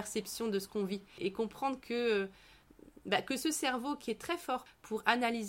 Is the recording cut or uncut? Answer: uncut